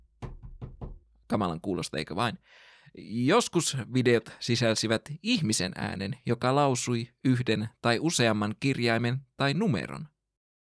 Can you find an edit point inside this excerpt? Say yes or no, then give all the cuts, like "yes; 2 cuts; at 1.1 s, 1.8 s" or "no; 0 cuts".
yes; 1 cut; at 1.0 s